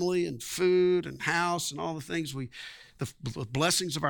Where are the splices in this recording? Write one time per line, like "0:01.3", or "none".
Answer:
none